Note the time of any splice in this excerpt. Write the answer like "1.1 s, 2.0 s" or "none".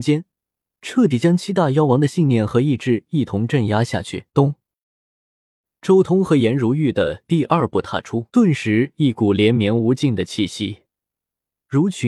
4.3 s, 8.3 s